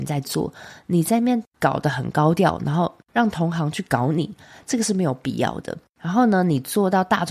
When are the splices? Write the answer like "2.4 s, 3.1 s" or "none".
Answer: none